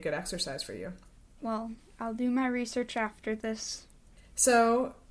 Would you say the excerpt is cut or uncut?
uncut